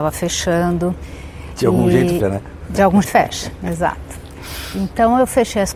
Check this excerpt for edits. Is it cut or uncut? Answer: cut